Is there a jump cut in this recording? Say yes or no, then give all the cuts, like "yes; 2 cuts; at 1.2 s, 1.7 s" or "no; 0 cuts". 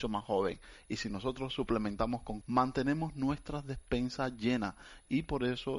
yes; 1 cut; at 2.4 s